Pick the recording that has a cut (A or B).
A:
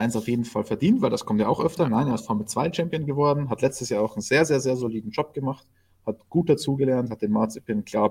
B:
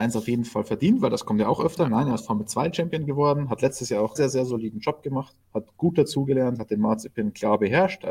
B